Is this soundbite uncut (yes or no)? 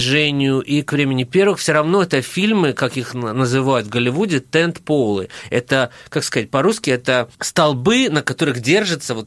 no